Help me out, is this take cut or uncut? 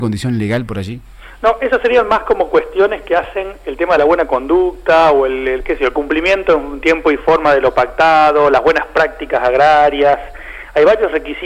uncut